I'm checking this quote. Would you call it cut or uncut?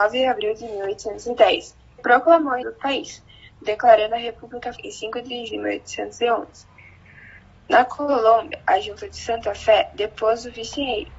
cut